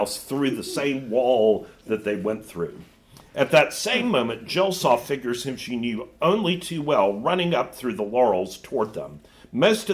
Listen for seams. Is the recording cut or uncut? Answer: uncut